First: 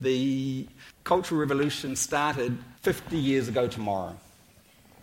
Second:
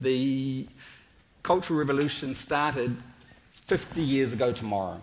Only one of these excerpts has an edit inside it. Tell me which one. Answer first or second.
first